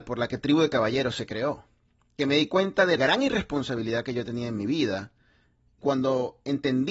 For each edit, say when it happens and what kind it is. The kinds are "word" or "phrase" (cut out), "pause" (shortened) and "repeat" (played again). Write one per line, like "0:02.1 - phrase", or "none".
0:02.2 - word
0:03.0 - word
0:05.8 - word